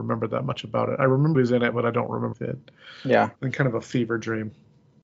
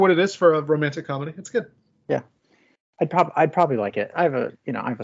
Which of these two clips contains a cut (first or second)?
first